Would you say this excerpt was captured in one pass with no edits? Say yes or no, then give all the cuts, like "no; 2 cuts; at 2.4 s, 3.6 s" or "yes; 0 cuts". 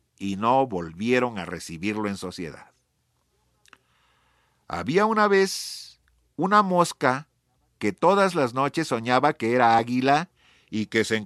yes; 0 cuts